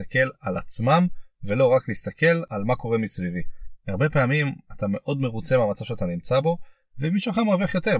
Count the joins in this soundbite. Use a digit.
0